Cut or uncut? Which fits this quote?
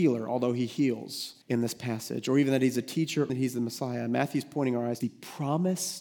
cut